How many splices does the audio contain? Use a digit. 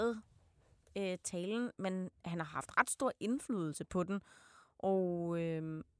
1